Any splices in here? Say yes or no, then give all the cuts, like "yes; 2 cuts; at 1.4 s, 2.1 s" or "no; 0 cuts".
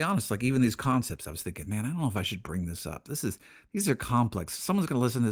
no; 0 cuts